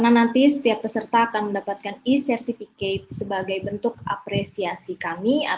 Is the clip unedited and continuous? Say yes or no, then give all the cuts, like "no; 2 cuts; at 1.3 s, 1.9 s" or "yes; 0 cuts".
yes; 0 cuts